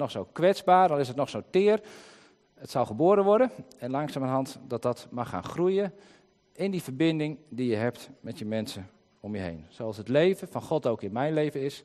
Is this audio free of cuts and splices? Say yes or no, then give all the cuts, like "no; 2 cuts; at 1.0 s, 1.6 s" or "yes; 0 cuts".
yes; 0 cuts